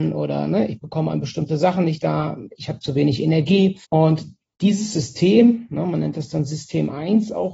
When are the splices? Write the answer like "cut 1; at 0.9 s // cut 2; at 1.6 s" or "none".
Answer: cut 1; at 3.8 s